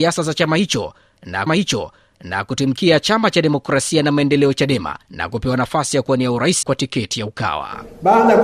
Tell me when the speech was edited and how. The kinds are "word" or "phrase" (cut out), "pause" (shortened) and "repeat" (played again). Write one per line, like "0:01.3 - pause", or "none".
0:01.5 - repeat
0:05.0 - pause
0:06.6 - word

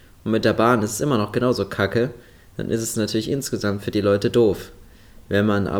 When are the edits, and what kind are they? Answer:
none

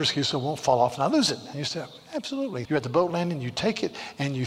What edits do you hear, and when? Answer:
0:02.6 - word

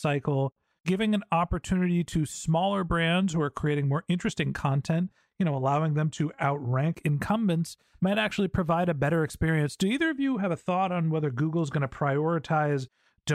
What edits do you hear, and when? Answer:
none

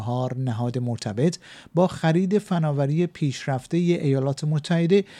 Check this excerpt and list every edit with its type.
none

